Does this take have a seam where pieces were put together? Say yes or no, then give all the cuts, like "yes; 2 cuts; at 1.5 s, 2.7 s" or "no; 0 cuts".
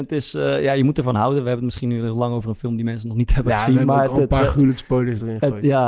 no; 0 cuts